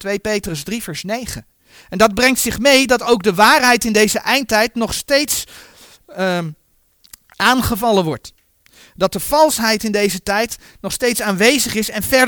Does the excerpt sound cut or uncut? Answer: uncut